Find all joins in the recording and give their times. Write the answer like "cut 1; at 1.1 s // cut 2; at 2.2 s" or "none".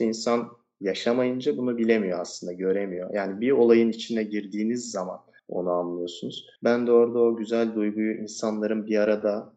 cut 1; at 5.4 s // cut 2; at 6.6 s